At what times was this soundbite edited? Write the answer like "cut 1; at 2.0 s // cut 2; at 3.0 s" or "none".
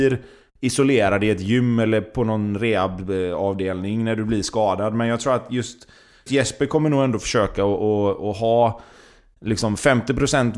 cut 1; at 6.3 s